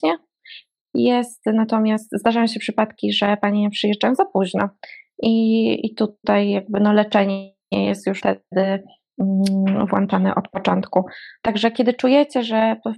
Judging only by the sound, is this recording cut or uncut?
cut